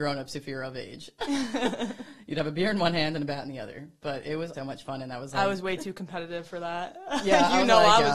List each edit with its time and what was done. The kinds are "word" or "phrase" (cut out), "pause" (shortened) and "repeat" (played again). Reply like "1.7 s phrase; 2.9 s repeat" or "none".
4.5 s word